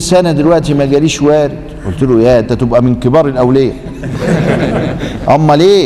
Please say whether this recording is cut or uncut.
cut